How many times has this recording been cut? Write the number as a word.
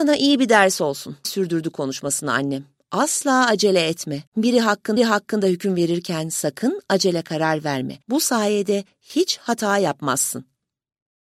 four